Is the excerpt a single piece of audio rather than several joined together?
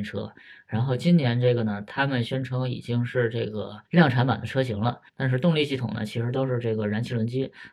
no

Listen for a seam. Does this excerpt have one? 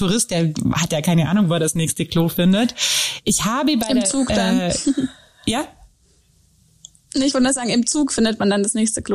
no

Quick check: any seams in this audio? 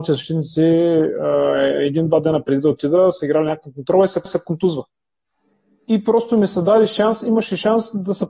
yes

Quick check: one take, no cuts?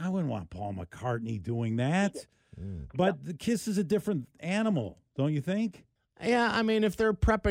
no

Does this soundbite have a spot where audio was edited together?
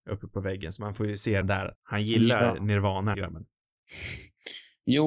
yes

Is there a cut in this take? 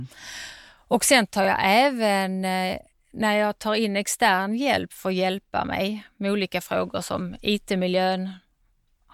no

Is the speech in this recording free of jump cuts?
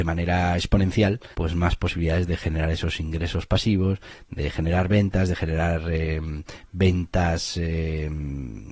no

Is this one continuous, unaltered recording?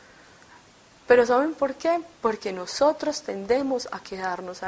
no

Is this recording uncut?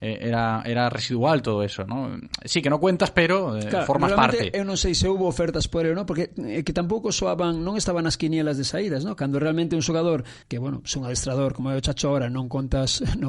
no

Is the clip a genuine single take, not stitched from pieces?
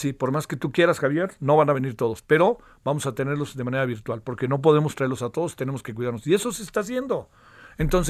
yes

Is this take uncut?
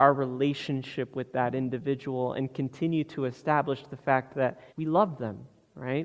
no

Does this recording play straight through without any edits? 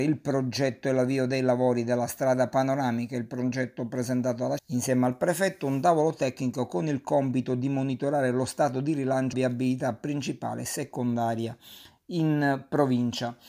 no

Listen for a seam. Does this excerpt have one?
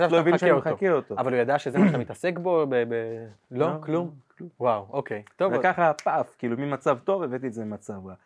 no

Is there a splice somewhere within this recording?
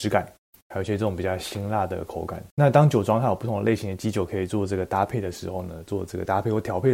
yes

